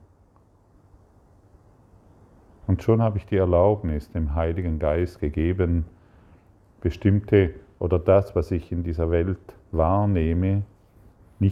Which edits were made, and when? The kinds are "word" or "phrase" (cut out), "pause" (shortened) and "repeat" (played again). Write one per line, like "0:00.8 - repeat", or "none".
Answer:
none